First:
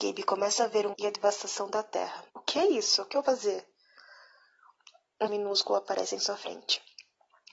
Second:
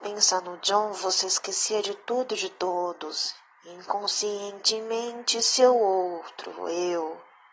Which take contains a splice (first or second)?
first